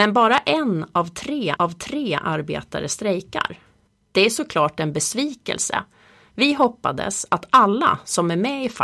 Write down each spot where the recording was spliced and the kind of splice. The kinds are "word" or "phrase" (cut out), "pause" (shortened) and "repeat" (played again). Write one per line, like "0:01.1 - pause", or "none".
0:01.6 - repeat
0:03.9 - pause